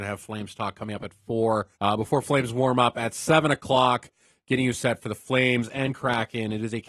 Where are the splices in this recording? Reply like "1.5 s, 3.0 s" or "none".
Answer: 1.7 s